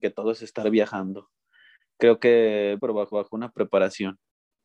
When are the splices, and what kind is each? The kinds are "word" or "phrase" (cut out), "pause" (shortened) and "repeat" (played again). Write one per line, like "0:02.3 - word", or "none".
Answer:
0:02.8 - word
0:03.1 - repeat